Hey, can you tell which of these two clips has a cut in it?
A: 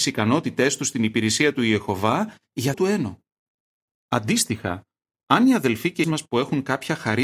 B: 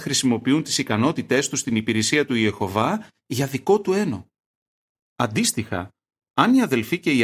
A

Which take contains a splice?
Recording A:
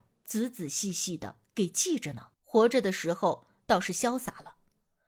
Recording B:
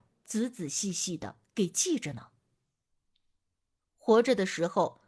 A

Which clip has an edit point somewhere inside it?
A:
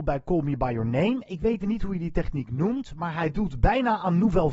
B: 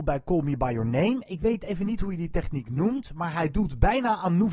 A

